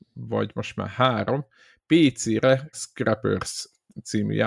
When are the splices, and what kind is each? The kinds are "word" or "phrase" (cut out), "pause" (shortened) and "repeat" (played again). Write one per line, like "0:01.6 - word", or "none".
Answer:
0:02.7 - phrase